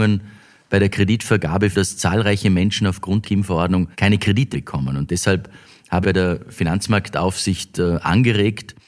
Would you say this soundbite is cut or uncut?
cut